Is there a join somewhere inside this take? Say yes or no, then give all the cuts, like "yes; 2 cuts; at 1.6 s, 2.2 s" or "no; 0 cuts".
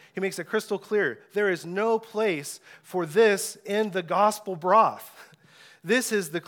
no; 0 cuts